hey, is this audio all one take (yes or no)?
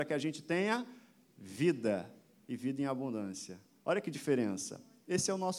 yes